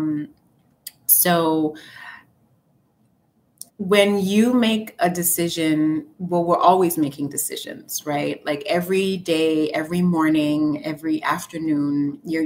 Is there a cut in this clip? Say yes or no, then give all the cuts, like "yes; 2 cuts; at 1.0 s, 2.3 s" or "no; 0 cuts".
yes; 2 cuts; at 3.7 s, 6.1 s